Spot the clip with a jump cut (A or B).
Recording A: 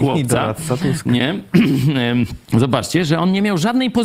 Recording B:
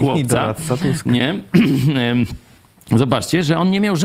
A